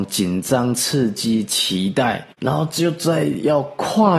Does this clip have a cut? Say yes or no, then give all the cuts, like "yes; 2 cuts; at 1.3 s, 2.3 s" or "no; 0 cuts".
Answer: yes; 1 cut; at 2.3 s